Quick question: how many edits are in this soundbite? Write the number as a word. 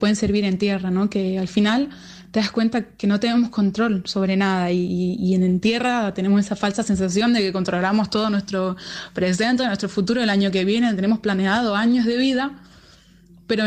zero